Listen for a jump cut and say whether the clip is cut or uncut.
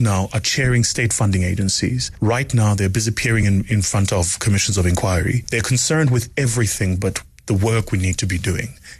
uncut